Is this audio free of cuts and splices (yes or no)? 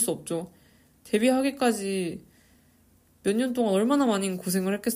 yes